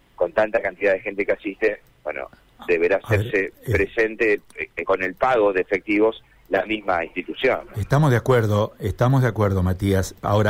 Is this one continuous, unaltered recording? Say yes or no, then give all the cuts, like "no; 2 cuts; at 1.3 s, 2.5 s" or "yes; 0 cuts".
yes; 0 cuts